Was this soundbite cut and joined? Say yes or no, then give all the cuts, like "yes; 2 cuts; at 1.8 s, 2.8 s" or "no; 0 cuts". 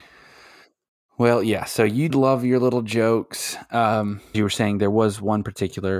yes; 2 cuts; at 2.1 s, 4.3 s